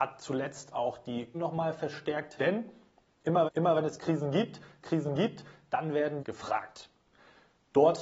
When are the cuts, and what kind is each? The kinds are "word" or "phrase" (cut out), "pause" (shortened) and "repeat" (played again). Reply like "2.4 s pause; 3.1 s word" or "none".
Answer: 1.3 s word; 2.4 s word; 3.4 s repeat; 4.8 s repeat; 6.2 s phrase